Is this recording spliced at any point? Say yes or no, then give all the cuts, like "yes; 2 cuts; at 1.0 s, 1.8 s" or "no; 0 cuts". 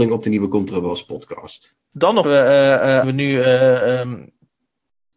yes; 2 cuts; at 2.2 s, 3.0 s